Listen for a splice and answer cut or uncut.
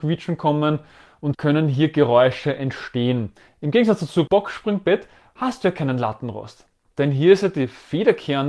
cut